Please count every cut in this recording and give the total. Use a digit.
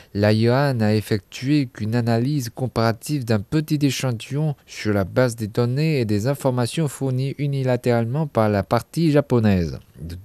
0